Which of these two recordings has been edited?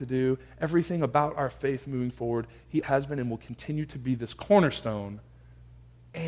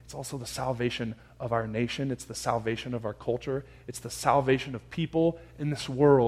first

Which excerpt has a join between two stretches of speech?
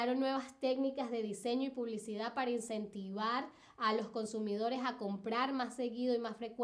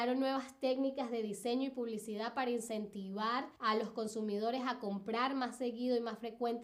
second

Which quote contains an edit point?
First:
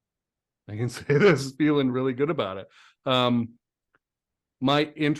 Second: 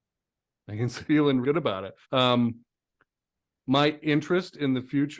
second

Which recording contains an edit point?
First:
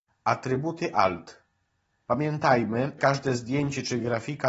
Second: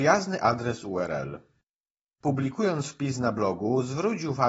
first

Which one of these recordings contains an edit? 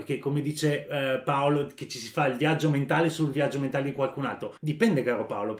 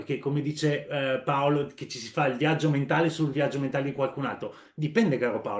first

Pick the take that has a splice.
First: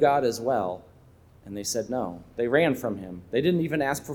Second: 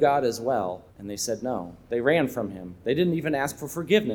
second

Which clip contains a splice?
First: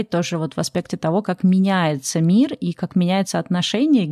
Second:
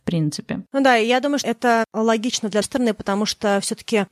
second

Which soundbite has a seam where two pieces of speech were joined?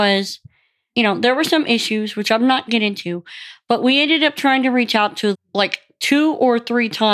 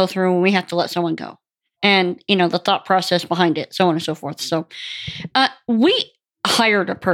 first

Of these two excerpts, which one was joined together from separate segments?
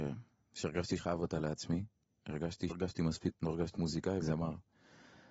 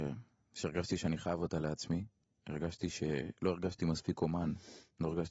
first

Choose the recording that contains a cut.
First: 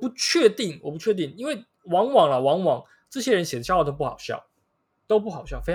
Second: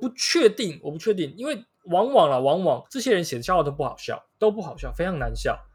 second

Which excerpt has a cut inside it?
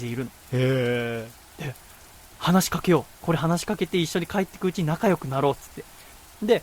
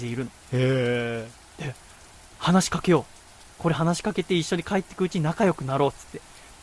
first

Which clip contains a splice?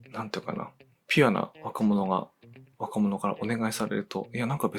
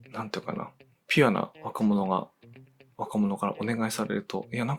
first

